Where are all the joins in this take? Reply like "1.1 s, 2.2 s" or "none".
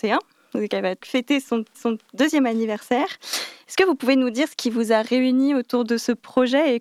1.0 s, 1.7 s